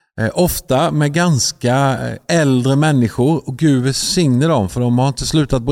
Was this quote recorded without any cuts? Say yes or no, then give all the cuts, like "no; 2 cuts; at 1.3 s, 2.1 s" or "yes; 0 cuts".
yes; 0 cuts